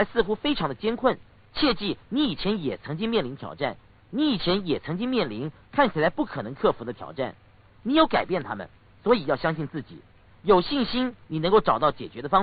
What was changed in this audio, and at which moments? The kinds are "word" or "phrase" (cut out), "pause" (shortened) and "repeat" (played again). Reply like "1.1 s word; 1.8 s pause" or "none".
none